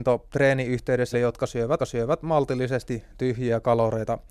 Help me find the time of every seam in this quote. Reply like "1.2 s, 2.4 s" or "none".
1.1 s, 1.8 s

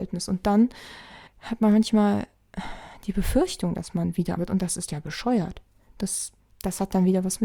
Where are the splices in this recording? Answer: 1.3 s, 4.4 s, 6.4 s

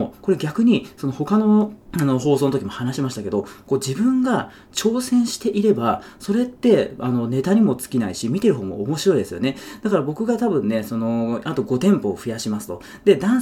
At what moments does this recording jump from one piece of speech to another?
1.8 s

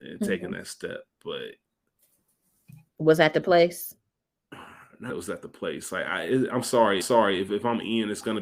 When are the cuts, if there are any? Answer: 2.9 s, 5.1 s, 7.0 s

